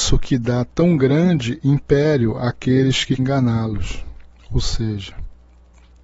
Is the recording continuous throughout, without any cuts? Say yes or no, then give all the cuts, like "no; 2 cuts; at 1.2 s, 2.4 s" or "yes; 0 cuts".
no; 1 cut; at 3.2 s